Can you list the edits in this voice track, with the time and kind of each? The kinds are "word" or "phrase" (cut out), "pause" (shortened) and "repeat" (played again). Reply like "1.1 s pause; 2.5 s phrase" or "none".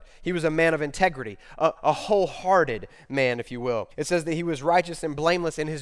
3.9 s pause